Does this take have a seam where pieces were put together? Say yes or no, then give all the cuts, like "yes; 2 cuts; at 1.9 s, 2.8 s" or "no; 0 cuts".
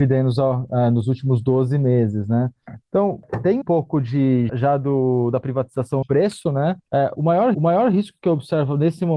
yes; 5 cuts; at 3.6 s, 4.5 s, 6.0 s, 7.1 s, 7.5 s